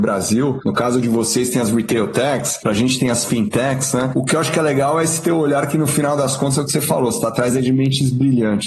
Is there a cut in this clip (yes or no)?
no